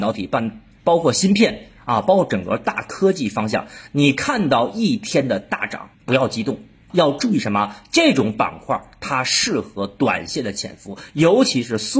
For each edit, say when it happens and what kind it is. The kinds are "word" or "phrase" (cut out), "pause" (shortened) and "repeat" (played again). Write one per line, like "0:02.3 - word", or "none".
0:05.9 - pause
0:06.9 - word